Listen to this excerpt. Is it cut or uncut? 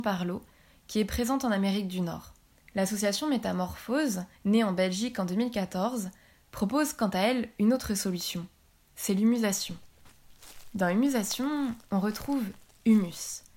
cut